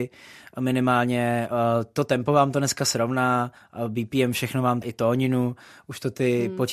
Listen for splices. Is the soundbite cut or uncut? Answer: cut